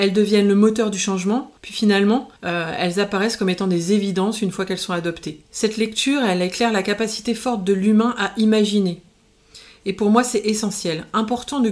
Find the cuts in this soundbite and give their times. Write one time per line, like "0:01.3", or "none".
0:01.6
0:02.4
0:05.5